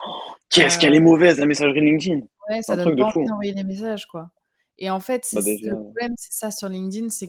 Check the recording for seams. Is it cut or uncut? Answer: uncut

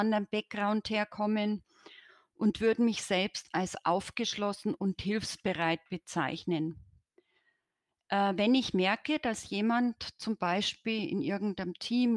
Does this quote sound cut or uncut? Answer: uncut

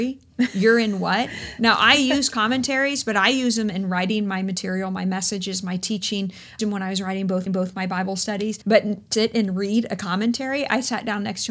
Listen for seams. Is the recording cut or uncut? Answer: cut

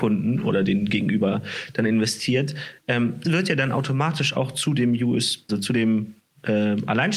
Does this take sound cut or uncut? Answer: cut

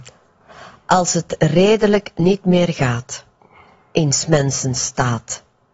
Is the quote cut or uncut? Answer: uncut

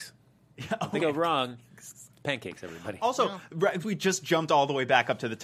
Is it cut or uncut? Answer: cut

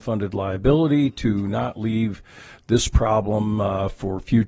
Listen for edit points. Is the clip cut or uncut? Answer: uncut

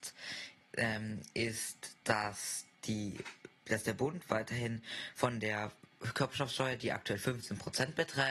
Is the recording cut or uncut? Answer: uncut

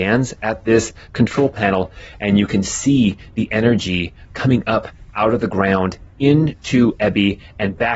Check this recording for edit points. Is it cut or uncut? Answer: uncut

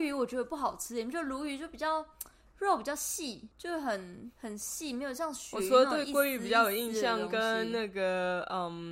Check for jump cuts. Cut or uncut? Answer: uncut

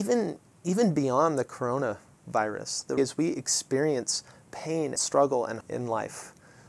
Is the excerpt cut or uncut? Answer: cut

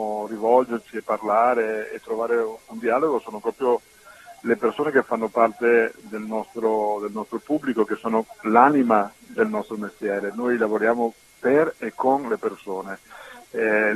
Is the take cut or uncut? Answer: uncut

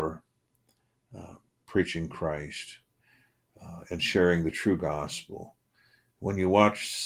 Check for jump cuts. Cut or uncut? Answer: uncut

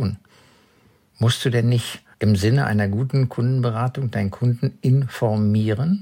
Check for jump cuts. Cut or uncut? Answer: cut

